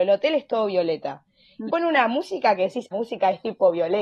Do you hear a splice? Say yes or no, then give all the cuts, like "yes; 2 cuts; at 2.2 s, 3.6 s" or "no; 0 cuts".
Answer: yes; 2 cuts; at 1.7 s, 2.9 s